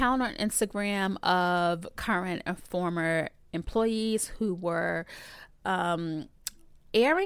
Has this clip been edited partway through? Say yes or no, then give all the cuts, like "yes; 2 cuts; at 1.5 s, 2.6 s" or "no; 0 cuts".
no; 0 cuts